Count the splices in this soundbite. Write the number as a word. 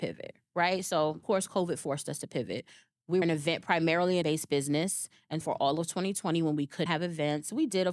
five